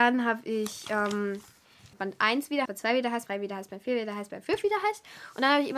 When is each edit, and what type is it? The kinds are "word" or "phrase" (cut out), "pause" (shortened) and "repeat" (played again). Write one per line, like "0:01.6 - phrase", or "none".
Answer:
0:01.9 - word
0:02.7 - word
0:03.3 - word